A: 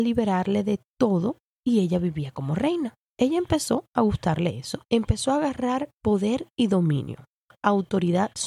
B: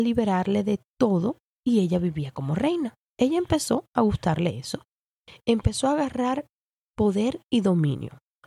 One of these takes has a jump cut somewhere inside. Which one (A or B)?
A